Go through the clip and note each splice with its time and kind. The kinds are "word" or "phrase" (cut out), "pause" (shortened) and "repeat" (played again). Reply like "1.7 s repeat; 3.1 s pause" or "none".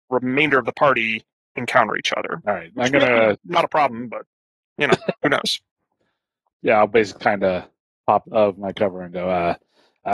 6.5 s word; 7.2 s word; 8.2 s word

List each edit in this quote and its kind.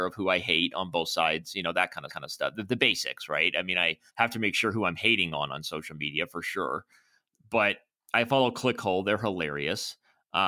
2.1 s repeat; 4.1 s pause

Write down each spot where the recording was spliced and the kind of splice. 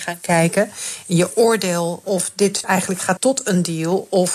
2.0 s word; 2.6 s word; 3.2 s word

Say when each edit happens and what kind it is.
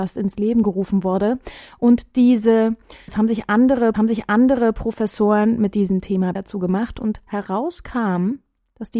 3.1 s word; 3.9 s repeat; 6.4 s phrase

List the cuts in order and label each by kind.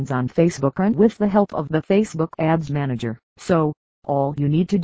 3.3 s pause

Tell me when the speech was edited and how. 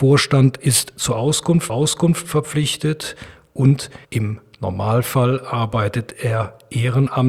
1.7 s repeat; 4.0 s pause

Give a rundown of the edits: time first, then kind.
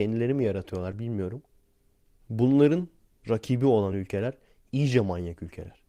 none

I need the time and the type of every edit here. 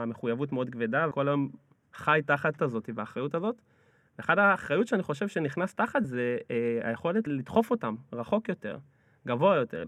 1.1 s word; 2.6 s word; 6.0 s word; 7.3 s word

